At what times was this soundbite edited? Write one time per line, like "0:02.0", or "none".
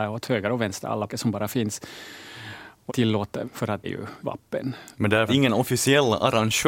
0:01.1
0:02.9
0:03.4
0:03.8
0:04.2
0:05.3